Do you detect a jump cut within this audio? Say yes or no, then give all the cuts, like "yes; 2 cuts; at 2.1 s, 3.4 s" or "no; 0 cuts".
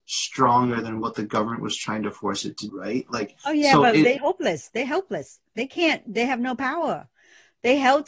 yes; 3 cuts; at 2.7 s, 4.2 s, 5.5 s